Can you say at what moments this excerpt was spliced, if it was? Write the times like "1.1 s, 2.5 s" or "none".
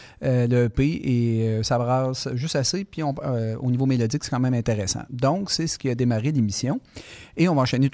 none